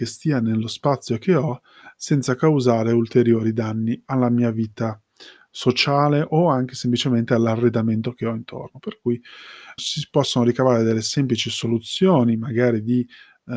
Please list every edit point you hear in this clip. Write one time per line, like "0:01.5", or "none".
0:09.8